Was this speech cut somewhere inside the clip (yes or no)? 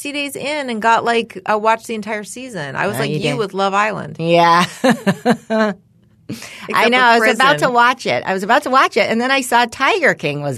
no